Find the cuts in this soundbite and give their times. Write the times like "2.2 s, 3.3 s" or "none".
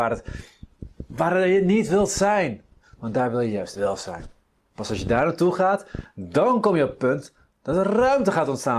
none